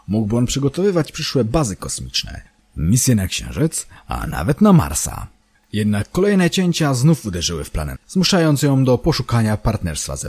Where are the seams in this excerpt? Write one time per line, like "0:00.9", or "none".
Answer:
0:07.9

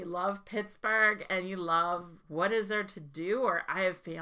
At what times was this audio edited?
0:02.2

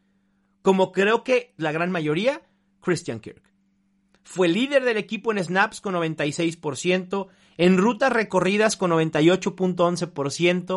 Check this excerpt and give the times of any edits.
0:01.6

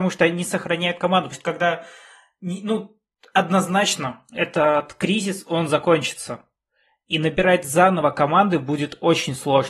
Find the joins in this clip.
0:01.3

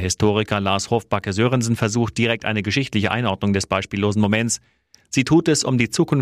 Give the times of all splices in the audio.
none

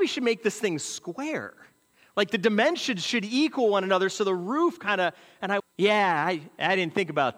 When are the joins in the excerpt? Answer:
0:05.6

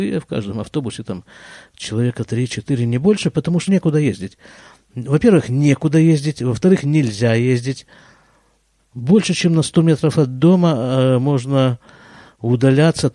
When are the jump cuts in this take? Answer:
0:03.7

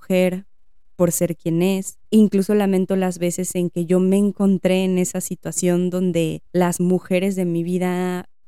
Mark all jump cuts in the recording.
0:02.0
0:06.5

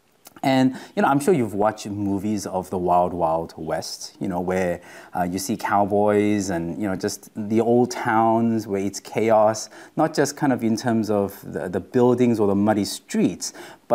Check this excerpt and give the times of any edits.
none

